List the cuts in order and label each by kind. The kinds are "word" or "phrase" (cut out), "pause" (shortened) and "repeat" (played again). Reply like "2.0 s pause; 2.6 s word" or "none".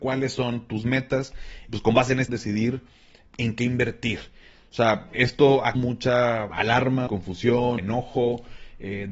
1.7 s word; 2.3 s word; 3.3 s word; 5.1 s word; 5.7 s word; 7.1 s word; 7.8 s word